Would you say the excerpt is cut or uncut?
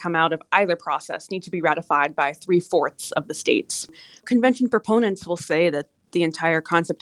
uncut